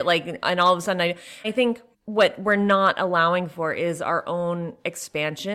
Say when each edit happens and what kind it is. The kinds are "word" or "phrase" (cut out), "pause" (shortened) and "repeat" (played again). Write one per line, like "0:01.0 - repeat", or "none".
0:01.4 - word
0:01.9 - pause